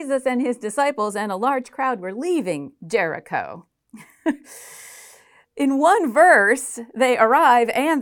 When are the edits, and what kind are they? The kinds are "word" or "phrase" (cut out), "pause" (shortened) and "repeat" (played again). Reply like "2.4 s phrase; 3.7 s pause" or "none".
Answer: 5.5 s word